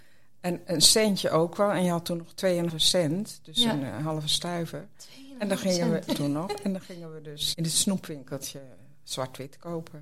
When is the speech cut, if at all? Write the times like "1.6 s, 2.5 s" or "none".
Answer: 2.7 s, 6.1 s, 7.5 s